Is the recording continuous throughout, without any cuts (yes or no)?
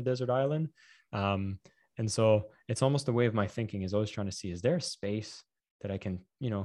yes